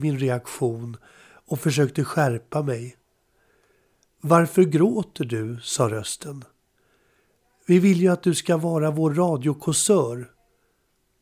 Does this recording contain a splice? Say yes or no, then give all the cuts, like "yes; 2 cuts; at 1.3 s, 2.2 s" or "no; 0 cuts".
no; 0 cuts